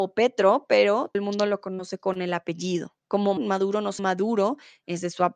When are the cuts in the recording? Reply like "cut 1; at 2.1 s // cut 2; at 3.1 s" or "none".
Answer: cut 1; at 1.1 s // cut 2; at 3.4 s // cut 3; at 4.0 s